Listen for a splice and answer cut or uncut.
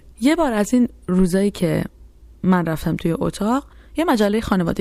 uncut